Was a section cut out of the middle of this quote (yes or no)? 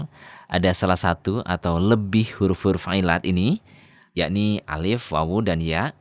no